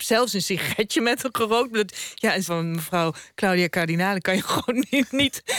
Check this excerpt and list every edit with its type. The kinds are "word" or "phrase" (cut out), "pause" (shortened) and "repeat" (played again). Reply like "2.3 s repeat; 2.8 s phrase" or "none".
2.4 s word